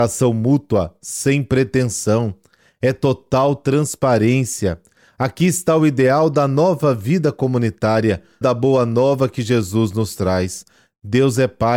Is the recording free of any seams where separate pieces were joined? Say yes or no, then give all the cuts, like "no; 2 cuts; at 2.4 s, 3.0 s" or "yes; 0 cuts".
no; 1 cut; at 8.4 s